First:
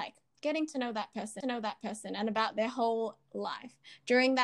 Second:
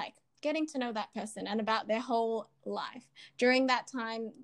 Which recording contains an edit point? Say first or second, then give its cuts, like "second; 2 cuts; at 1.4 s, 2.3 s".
first; 1 cut; at 1.4 s